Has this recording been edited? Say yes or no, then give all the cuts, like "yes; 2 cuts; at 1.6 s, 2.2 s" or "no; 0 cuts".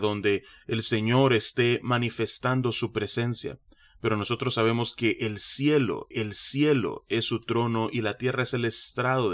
yes; 1 cut; at 6.1 s